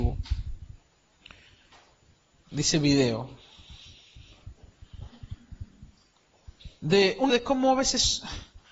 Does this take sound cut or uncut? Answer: cut